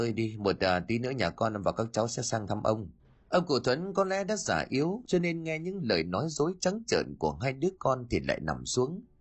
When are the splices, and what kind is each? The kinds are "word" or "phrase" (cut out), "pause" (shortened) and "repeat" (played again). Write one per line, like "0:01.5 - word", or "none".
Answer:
0:03.0 - pause